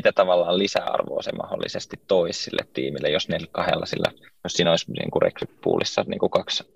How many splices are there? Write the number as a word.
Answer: zero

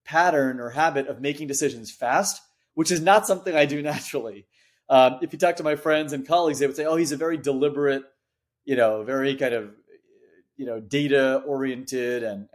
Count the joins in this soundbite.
zero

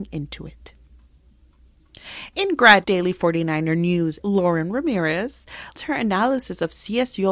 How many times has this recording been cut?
three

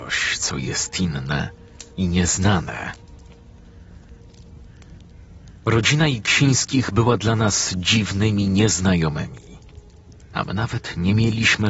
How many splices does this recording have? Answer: one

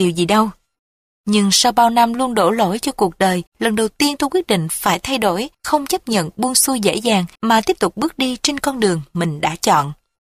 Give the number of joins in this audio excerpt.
three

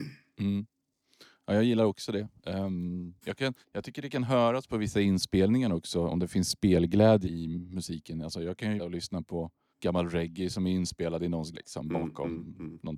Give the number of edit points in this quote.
seven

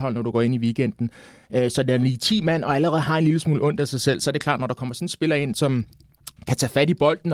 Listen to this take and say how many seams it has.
zero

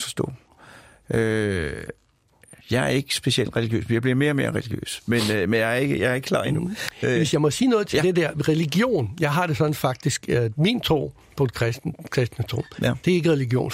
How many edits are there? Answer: three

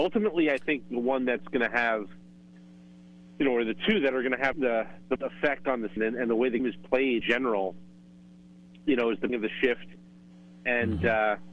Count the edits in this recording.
six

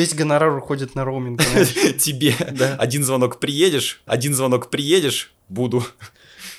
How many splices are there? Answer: one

